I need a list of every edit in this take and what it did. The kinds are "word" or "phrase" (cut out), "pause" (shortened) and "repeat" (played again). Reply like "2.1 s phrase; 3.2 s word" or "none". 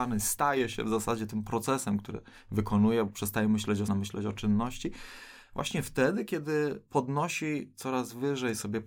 3.9 s phrase; 6.9 s pause